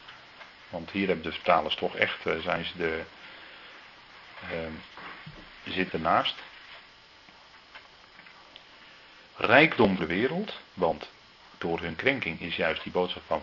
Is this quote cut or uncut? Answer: cut